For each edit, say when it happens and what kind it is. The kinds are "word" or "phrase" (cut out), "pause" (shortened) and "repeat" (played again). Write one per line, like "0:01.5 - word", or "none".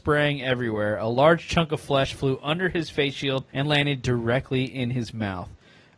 0:03.5 - pause